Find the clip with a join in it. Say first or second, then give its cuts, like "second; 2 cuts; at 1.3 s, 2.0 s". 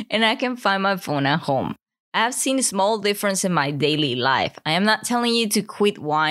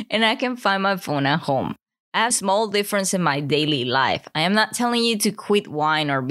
second; 1 cut; at 2.3 s